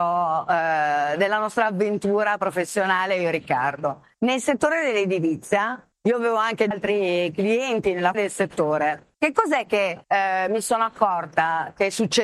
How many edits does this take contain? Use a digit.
6